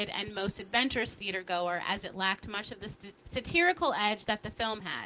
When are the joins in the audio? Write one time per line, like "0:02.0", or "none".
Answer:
0:03.2